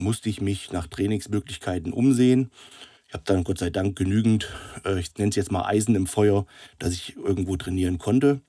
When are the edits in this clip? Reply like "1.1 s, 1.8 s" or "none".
3.0 s

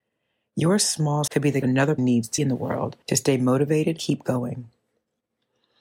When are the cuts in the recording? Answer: 1.3 s, 1.6 s, 2.0 s, 2.4 s, 3.0 s, 4.0 s

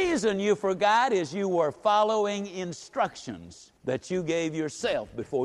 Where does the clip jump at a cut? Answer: 3.8 s

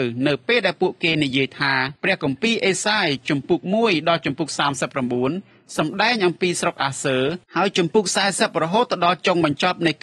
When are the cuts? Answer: 2.0 s, 7.4 s

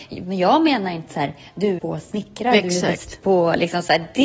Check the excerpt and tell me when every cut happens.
1.1 s, 1.8 s

